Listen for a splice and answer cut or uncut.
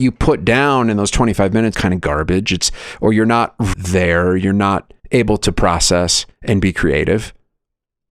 cut